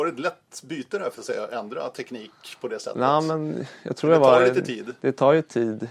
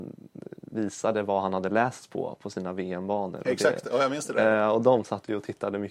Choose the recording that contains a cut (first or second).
first